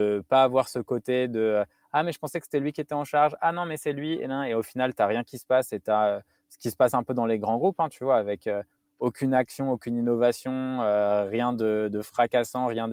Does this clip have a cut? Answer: no; 0 cuts

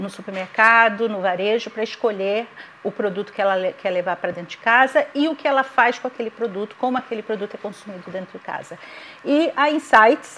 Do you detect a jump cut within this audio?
no; 0 cuts

